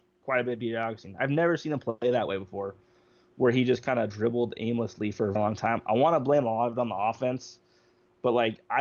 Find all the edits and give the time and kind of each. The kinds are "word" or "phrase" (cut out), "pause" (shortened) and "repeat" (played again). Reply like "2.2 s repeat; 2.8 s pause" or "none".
5.3 s word

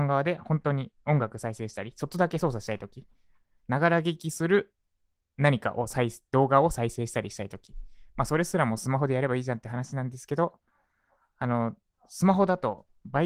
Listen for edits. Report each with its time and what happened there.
none

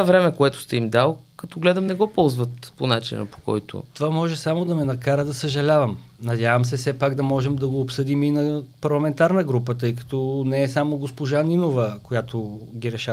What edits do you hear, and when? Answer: none

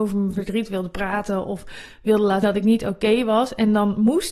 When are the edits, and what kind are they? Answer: 2.4 s word

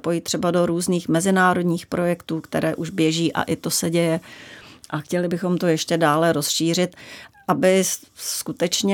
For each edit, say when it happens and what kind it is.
none

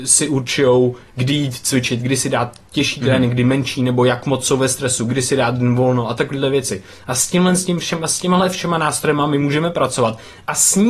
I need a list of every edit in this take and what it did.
none

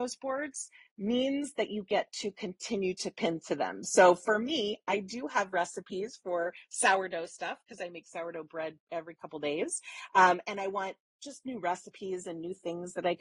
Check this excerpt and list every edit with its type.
8.8 s pause

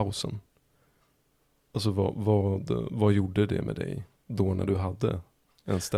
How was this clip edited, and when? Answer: 4.2 s pause

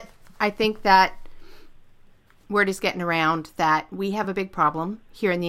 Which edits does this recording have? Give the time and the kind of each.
none

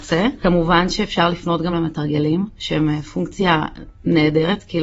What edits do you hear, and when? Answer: none

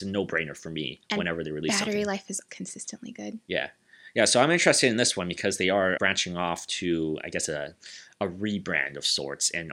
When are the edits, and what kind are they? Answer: 2.5 s word; 6.0 s word

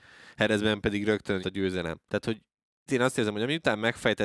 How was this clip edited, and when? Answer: 1.4 s word; 2.1 s pause; 2.9 s word

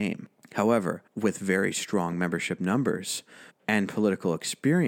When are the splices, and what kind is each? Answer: 1.1 s pause; 3.5 s pause

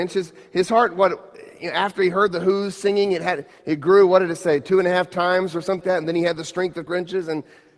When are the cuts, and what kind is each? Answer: 5.8 s word; 6.9 s word

